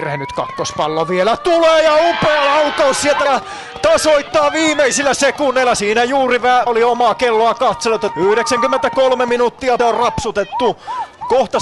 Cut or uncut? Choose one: cut